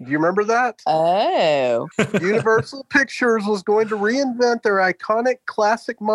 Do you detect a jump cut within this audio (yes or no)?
no